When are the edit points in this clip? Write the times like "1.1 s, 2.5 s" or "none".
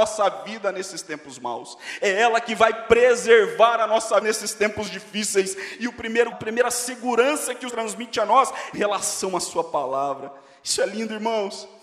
4.2 s, 6.3 s, 7.7 s, 8.7 s